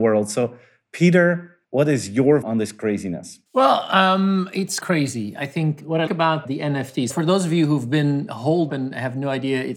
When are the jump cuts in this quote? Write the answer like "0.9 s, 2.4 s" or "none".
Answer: 1.6 s, 2.4 s, 3.5 s, 4.8 s, 6.1 s, 7.1 s, 8.7 s